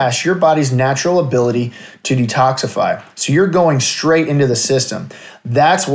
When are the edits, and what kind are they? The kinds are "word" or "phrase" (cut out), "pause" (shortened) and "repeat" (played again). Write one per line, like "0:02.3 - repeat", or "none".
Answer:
none